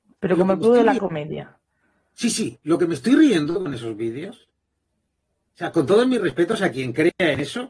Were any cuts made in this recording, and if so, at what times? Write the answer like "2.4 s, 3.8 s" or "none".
none